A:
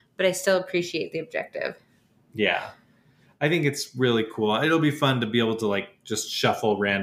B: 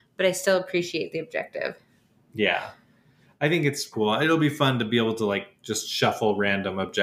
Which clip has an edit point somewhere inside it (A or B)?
B